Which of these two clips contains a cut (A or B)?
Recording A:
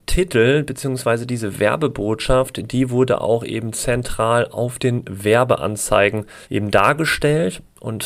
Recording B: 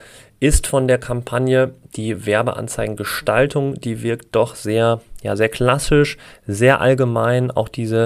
A